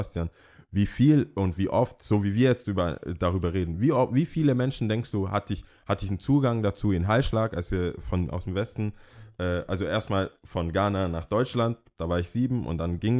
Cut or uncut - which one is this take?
uncut